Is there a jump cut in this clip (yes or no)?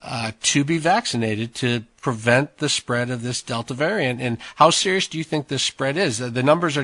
no